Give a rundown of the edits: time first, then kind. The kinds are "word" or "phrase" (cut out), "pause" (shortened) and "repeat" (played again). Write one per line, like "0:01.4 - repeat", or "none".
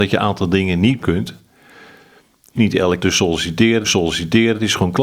0:01.0 - word
0:02.5 - word
0:03.0 - word
0:03.8 - repeat